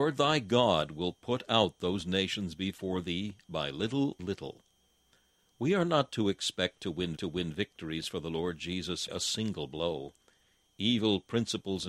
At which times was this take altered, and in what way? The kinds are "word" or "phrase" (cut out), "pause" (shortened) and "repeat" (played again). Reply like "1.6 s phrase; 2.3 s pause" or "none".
4.2 s word; 7.2 s repeat; 9.1 s word